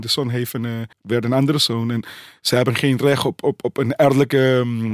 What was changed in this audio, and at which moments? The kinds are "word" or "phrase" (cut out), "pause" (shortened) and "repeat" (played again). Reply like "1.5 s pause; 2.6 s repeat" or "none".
0.9 s pause